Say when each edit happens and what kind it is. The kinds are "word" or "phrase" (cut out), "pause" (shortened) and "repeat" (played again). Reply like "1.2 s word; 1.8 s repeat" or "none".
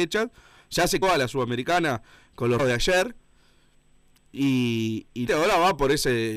1.0 s word; 2.6 s word; 5.3 s word